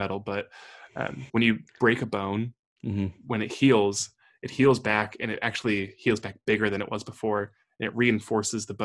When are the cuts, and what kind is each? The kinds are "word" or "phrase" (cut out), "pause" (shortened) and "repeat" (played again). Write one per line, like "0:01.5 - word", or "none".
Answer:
0:01.3 - word